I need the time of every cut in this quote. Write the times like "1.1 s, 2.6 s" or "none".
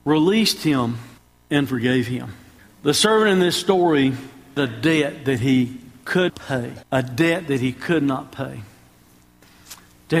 1.2 s, 2.6 s, 4.6 s, 6.3 s, 6.8 s

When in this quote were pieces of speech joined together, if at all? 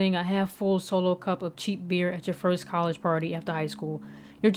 none

